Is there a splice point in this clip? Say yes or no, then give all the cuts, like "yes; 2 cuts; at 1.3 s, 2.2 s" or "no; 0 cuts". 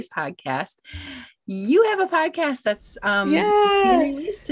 no; 0 cuts